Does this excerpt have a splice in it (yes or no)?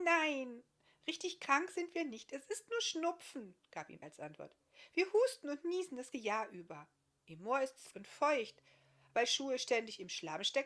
yes